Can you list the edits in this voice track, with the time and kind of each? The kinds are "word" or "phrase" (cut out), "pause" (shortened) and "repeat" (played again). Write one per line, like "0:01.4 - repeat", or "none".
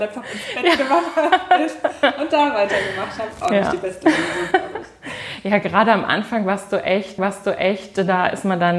0:07.2 - repeat

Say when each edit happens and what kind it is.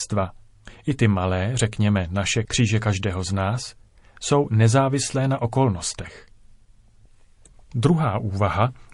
0:02.5 - word

